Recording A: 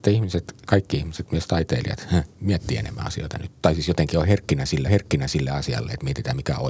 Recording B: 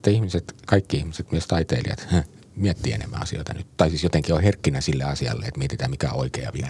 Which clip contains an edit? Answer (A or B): A